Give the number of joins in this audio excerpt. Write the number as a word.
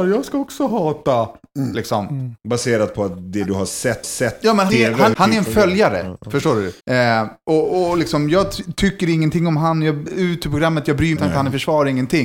seven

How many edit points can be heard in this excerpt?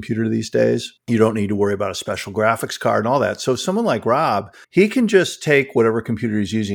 two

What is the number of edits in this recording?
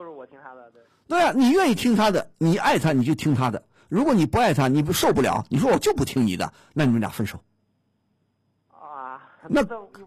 zero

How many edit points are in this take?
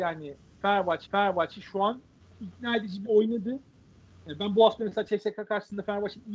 three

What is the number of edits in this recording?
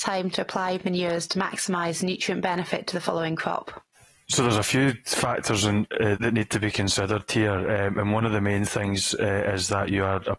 one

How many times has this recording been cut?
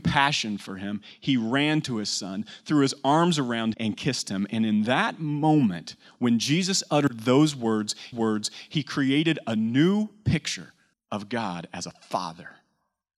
three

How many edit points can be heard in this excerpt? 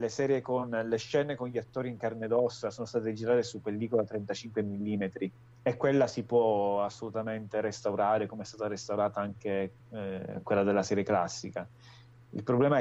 zero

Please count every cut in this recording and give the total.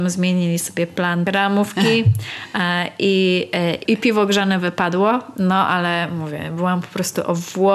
one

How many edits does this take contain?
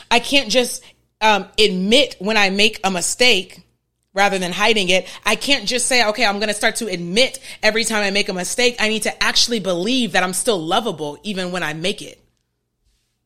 one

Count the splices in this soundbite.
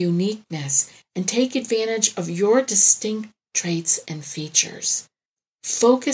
zero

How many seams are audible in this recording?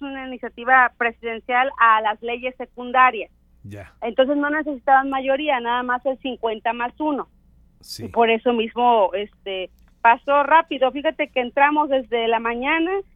zero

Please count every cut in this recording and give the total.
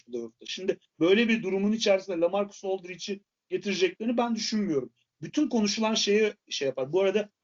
zero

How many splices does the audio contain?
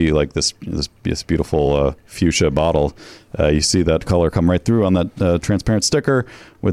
zero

